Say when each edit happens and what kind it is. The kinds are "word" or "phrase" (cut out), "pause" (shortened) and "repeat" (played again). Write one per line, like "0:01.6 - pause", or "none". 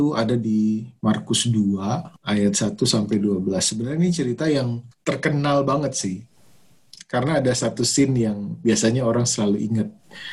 0:02.2 - pause
0:04.9 - pause